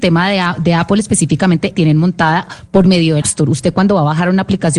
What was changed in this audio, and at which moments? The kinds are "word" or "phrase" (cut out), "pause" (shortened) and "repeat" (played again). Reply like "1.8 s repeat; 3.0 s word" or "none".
1.7 s phrase; 3.2 s word